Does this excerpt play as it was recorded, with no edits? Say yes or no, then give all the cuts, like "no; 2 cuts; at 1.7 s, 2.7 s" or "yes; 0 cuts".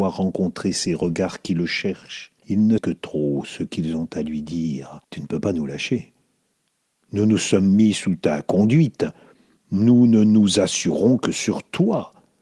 no; 3 cuts; at 2.4 s, 2.8 s, 5.0 s